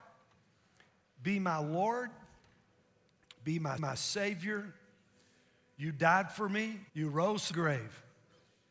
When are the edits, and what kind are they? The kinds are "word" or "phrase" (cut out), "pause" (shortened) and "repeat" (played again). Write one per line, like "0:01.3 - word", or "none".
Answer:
0:03.8 - repeat
0:06.9 - pause
0:07.5 - word